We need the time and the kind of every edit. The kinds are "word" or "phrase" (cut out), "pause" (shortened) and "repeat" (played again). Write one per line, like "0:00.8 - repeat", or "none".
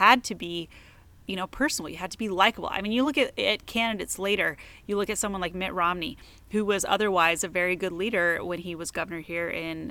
none